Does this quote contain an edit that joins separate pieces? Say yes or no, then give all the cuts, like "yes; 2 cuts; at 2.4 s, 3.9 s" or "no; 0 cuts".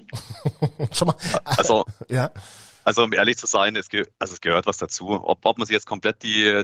no; 0 cuts